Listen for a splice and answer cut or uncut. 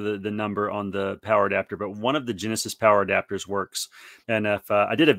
cut